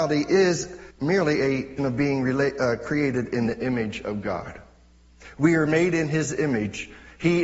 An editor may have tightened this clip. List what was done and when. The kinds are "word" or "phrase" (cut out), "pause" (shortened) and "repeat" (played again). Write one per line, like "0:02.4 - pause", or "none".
0:00.9 - pause
0:01.8 - word